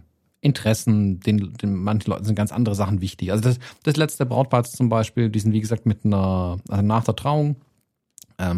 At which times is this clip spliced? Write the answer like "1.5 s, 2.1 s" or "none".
none